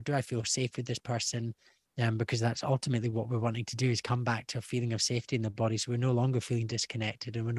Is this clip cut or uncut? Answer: uncut